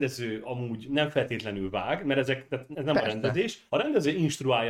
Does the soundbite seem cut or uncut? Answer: cut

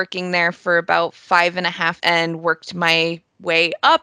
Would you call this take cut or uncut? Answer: cut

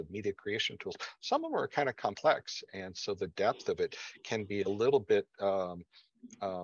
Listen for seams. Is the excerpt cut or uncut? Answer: uncut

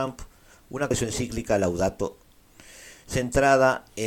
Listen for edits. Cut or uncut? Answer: cut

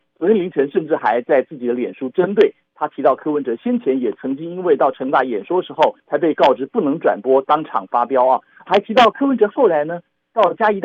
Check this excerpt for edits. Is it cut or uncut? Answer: cut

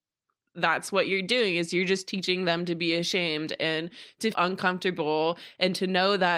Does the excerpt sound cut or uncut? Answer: cut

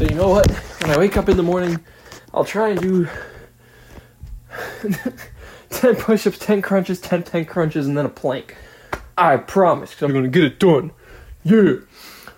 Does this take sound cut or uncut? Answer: cut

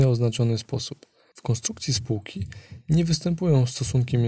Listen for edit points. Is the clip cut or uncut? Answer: uncut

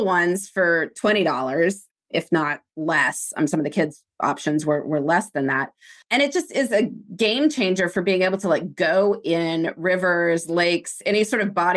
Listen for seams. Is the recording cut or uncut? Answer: cut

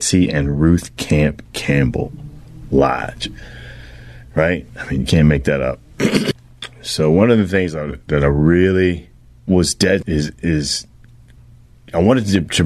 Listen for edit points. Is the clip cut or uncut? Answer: cut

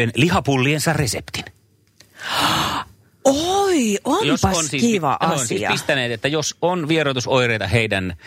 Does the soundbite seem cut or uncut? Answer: uncut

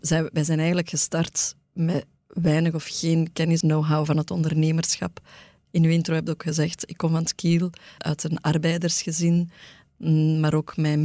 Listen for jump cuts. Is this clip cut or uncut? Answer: cut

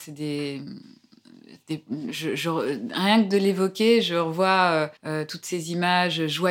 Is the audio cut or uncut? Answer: cut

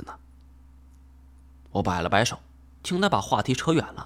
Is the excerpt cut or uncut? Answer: uncut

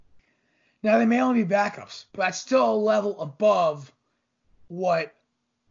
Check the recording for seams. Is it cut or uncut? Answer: cut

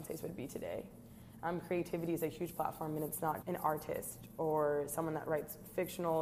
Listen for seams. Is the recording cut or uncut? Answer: cut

